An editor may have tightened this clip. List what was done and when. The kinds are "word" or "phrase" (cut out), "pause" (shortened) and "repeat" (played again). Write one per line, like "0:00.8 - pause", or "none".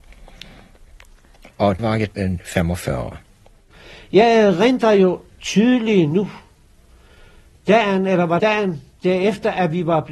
0:01.8 - word
0:02.1 - word
0:08.4 - word